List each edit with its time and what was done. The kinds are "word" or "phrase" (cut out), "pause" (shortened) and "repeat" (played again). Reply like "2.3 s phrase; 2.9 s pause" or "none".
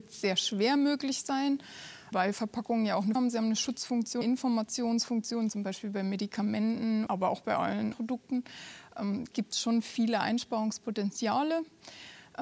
2.1 s word; 3.2 s word; 4.2 s word; 7.1 s word; 7.9 s word; 9.3 s word